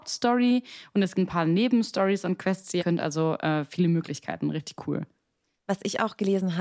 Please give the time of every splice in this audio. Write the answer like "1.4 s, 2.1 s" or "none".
1.1 s, 2.8 s